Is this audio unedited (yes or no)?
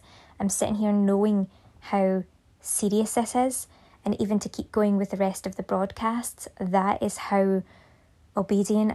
yes